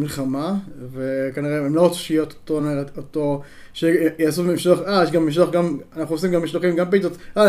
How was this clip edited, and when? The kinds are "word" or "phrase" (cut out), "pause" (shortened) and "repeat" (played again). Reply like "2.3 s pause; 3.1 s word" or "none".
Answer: none